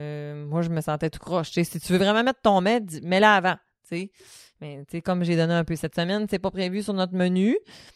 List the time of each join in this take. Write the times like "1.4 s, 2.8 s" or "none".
none